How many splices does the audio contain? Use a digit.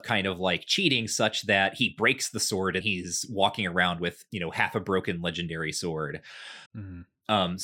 2